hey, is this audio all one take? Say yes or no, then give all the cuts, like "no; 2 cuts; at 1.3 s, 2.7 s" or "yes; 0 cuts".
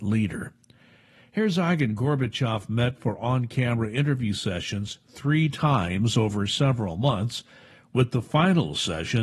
yes; 0 cuts